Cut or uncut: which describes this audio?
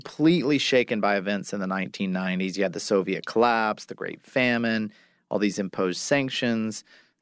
uncut